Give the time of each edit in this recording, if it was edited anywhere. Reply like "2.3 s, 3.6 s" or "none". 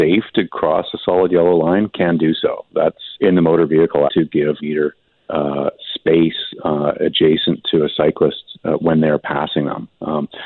3.1 s, 4.1 s, 4.6 s, 5.1 s